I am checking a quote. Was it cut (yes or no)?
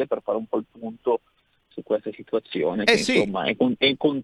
no